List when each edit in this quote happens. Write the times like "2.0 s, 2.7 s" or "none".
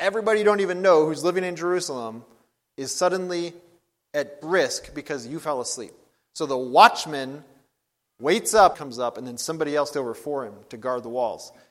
4.4 s, 8.7 s, 9.9 s